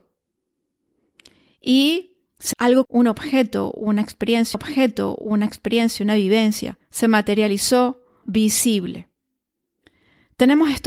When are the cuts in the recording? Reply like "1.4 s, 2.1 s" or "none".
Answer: 2.5 s, 2.8 s, 4.5 s, 6.8 s, 8.2 s